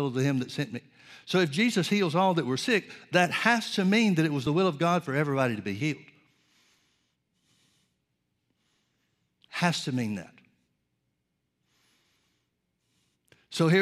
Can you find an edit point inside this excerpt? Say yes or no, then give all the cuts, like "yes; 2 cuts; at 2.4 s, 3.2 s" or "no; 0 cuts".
no; 0 cuts